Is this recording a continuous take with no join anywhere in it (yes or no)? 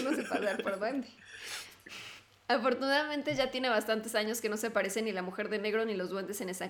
yes